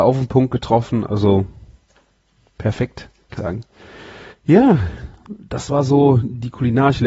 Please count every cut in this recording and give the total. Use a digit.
3